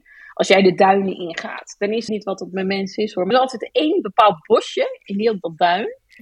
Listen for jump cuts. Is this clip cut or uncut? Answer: cut